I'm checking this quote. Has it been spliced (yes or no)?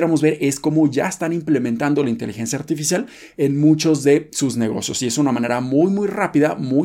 no